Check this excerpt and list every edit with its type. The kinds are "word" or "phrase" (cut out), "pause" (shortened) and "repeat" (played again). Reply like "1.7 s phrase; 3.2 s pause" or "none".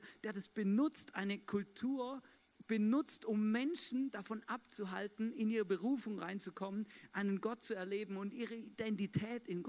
none

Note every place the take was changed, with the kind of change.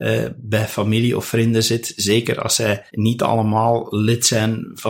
2.9 s pause

